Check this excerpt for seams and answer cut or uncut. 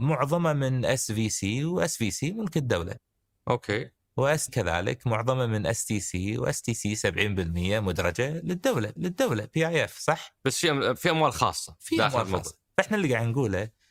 cut